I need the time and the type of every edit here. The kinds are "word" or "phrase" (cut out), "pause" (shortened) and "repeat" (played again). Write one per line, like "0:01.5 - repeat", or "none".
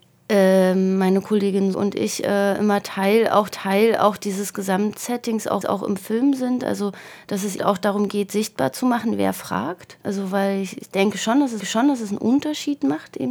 0:01.7 - word
0:03.5 - repeat
0:05.6 - repeat
0:07.6 - word
0:10.0 - pause
0:11.6 - repeat